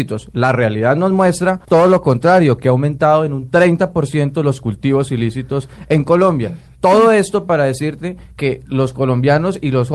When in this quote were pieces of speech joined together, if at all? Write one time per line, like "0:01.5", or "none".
0:01.6